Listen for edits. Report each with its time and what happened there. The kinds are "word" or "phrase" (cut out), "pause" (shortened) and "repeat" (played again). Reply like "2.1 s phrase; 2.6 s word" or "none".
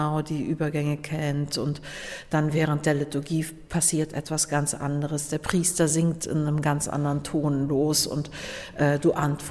none